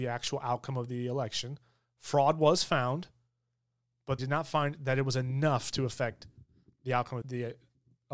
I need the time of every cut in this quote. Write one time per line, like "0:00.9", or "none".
0:04.2
0:07.2